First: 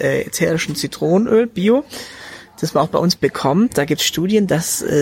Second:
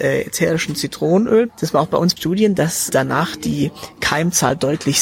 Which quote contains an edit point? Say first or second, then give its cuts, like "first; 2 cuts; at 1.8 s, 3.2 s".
second; 3 cuts; at 1.5 s, 2.2 s, 2.9 s